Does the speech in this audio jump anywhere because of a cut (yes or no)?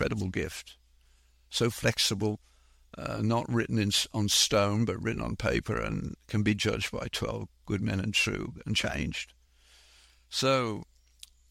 no